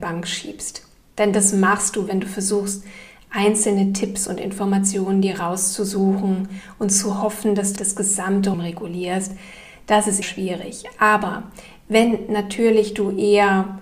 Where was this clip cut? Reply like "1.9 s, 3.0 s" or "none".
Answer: 7.8 s, 8.5 s, 10.2 s

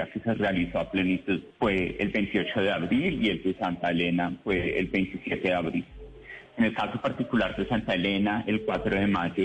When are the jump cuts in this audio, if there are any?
1.5 s

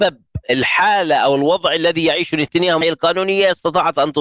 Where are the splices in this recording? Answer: 2.8 s

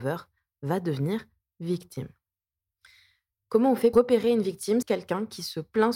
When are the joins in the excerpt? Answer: 3.9 s, 4.8 s

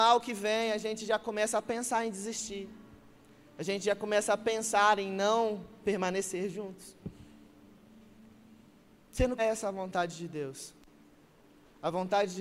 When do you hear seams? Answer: 9.4 s

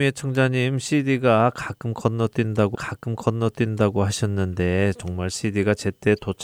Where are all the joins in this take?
2.7 s

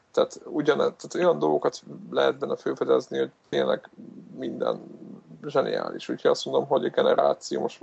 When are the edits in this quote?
none

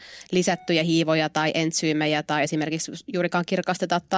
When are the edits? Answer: none

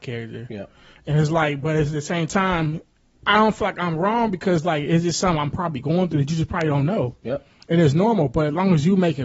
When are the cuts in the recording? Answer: none

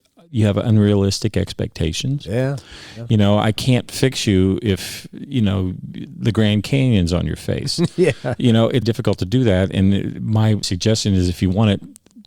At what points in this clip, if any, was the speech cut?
8.8 s, 10.6 s

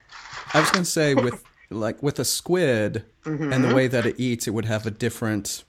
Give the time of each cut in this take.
3.1 s

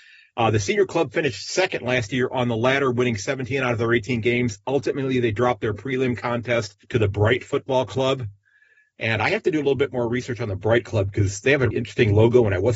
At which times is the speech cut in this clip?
6.8 s, 11.7 s

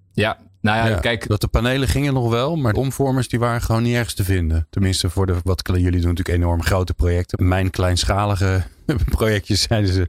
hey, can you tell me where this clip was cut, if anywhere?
2.7 s, 7.3 s

